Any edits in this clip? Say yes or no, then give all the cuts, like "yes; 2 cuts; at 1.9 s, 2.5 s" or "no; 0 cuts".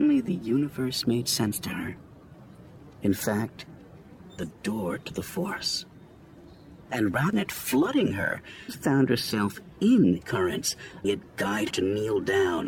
yes; 6 cuts; at 4.4 s, 7.3 s, 8.7 s, 10.2 s, 11.0 s, 11.7 s